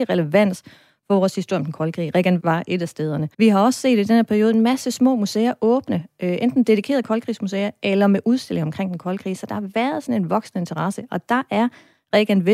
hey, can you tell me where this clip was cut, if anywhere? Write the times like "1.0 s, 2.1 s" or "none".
2.4 s, 3.3 s